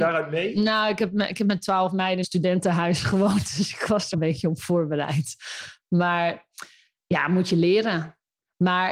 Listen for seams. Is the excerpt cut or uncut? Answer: cut